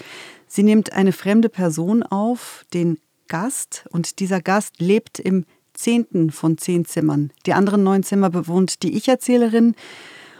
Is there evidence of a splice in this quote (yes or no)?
no